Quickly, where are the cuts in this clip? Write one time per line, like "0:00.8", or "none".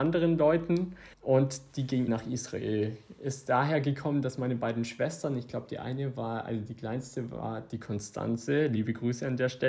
0:01.1
0:02.1